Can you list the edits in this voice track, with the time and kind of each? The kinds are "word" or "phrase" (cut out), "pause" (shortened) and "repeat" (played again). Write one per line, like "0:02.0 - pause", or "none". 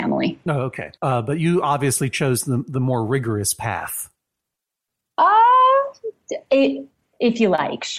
0:01.0 - pause